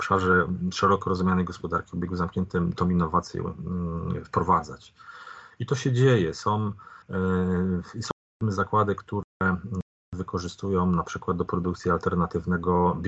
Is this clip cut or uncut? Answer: cut